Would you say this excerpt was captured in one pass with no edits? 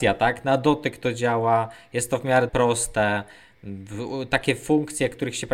no; 1 cut; at 2.5 s

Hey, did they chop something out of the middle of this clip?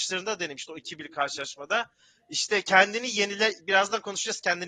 no; 0 cuts

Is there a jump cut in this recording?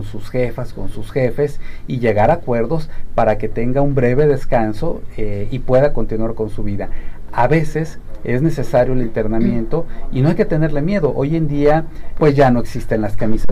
yes; 1 cut; at 12.2 s

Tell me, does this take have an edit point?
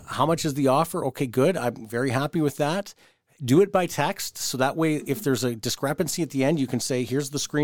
no; 0 cuts

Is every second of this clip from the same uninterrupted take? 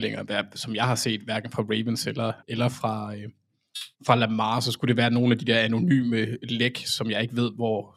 no; 2 cuts; at 2.4 s, 3.9 s

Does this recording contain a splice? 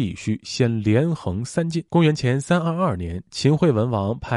yes; 1 cut; at 1.9 s

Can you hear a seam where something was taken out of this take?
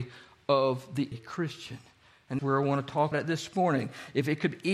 yes; 3 cuts; at 1.1 s, 2.4 s, 3.1 s

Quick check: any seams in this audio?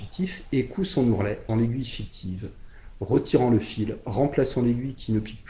yes; 1 cut; at 1.5 s

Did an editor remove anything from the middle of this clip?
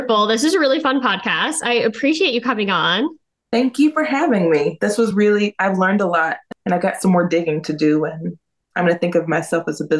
no; 0 cuts

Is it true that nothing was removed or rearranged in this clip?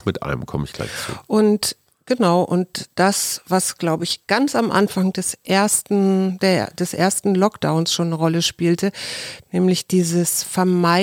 yes; 0 cuts

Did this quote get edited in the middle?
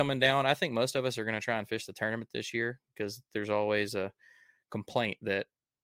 no; 0 cuts

